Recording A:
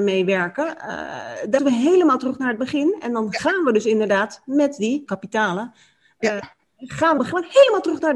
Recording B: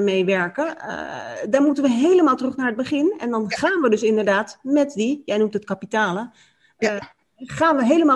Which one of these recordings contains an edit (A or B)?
A